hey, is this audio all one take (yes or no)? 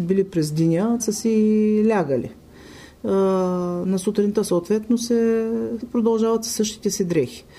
no